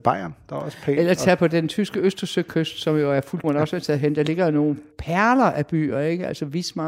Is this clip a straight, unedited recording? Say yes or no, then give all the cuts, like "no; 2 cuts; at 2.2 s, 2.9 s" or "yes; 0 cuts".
no; 1 cut; at 3.4 s